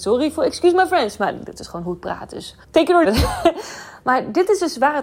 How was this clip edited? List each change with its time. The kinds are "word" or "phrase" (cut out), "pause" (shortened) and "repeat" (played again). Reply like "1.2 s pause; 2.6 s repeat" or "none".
2.6 s pause; 3.0 s word